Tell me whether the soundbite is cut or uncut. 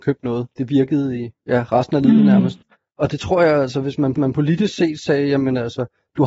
cut